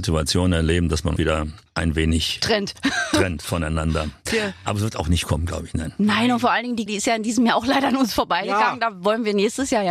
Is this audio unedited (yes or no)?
no